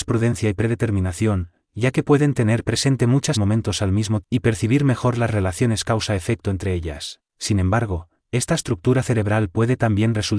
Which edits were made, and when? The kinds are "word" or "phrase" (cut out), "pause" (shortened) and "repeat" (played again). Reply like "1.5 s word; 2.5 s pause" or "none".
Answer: 3.3 s phrase; 4.2 s word; 7.3 s pause